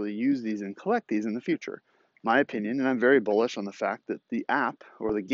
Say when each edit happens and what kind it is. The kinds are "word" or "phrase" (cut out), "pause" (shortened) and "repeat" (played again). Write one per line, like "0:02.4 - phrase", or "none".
none